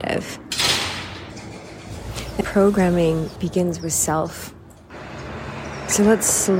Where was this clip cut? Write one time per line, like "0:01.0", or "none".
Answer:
0:02.4
0:03.4